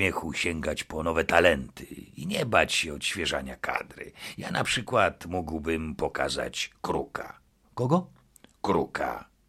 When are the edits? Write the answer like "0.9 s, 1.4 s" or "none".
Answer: none